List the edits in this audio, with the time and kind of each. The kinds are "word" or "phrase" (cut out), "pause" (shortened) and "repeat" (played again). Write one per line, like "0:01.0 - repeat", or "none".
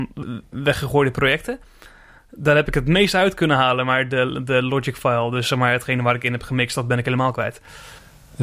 none